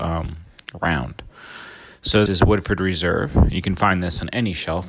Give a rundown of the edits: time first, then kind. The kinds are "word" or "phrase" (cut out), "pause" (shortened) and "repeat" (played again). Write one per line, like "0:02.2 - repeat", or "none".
0:02.3 - word